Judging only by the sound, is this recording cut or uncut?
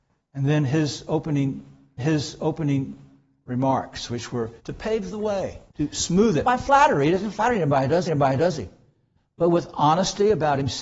cut